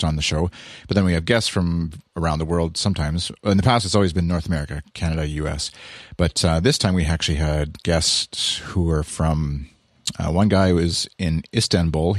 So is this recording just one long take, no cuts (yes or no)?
yes